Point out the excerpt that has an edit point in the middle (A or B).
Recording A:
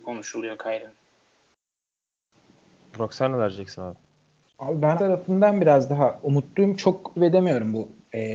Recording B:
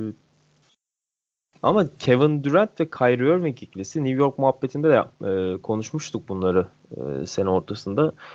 A